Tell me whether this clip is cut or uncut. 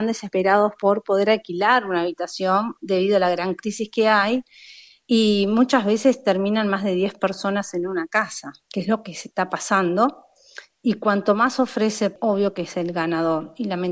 uncut